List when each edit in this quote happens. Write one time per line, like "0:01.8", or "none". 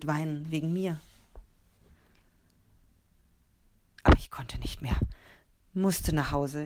none